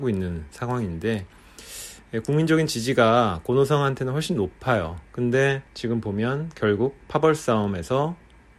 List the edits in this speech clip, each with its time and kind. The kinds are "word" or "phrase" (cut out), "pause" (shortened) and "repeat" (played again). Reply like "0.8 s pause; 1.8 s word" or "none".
5.7 s pause